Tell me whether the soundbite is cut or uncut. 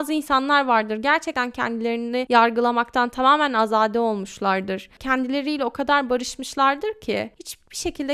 uncut